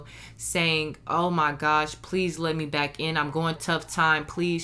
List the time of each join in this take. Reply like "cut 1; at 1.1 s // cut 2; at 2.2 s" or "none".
cut 1; at 3.6 s